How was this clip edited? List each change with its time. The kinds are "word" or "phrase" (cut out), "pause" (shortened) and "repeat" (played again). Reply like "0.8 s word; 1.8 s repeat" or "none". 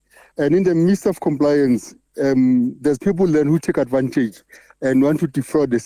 none